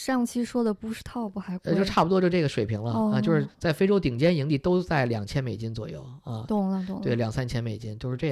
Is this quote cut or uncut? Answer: uncut